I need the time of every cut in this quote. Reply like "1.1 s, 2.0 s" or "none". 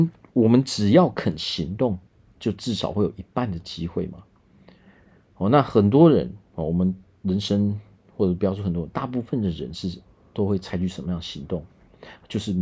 2.4 s